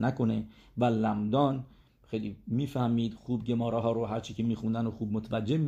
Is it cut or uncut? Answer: uncut